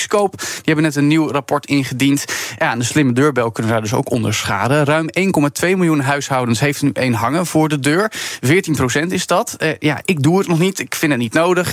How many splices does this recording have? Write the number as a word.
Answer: one